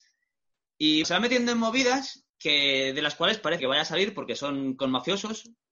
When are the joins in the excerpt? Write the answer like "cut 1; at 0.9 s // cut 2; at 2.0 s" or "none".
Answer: cut 1; at 1.0 s // cut 2; at 2.3 s // cut 3; at 3.6 s